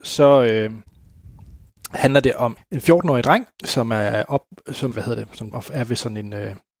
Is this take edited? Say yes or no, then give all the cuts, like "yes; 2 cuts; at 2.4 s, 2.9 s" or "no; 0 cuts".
yes; 4 cuts; at 2.6 s, 3.5 s, 4.9 s, 5.5 s